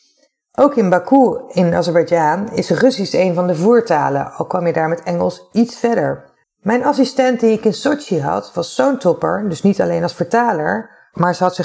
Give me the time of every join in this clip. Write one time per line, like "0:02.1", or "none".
0:06.4